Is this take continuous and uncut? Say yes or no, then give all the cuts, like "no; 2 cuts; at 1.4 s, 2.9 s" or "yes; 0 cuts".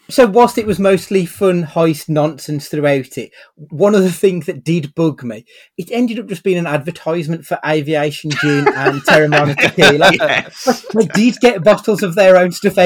yes; 0 cuts